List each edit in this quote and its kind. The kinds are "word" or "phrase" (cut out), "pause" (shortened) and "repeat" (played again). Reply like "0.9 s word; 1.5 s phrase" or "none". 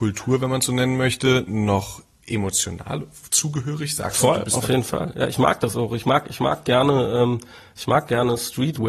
none